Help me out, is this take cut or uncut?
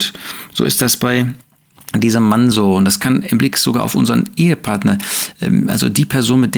uncut